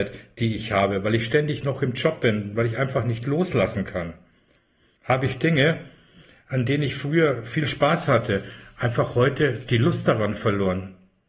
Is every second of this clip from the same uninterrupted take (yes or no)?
yes